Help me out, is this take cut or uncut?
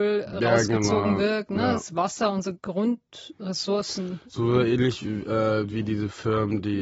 uncut